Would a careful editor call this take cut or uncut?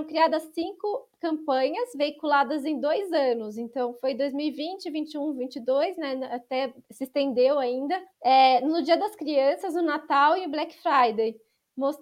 cut